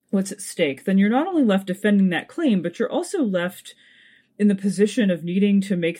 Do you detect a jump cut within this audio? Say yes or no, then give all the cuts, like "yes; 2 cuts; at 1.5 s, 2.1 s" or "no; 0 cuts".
no; 0 cuts